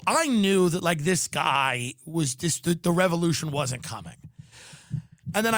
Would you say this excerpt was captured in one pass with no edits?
yes; 0 cuts

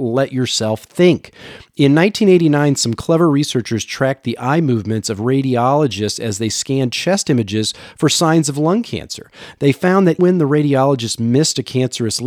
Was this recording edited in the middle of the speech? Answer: yes; 1 cut; at 10.2 s

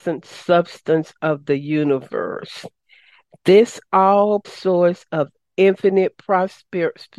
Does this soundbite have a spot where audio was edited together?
yes; 1 cut; at 4.4 s

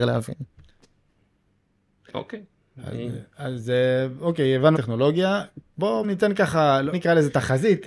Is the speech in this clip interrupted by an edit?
yes; 3 cuts; at 4.8 s, 6.0 s, 6.9 s

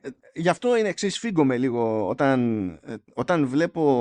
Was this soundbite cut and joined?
no; 0 cuts

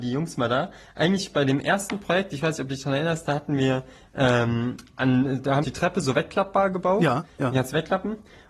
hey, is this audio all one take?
no; 1 cut; at 5.6 s

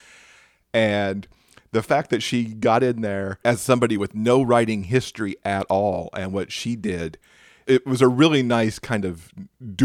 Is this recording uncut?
yes; 0 cuts

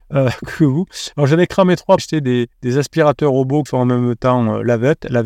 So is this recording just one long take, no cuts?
no; 3 cuts; at 2.0 s, 2.5 s, 3.7 s

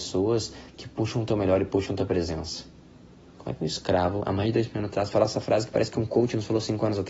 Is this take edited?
no; 0 cuts

